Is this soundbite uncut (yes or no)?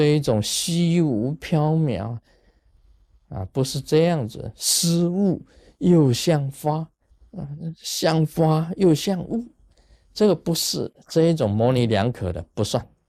no